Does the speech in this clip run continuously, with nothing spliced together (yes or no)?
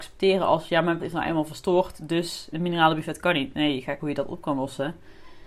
no